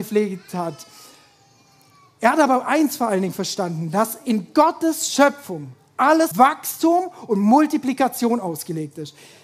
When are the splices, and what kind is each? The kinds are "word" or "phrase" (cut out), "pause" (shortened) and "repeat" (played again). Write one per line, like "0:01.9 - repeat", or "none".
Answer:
0:06.3 - word